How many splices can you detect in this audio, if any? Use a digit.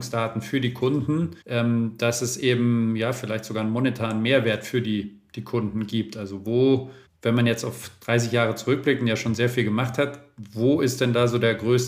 2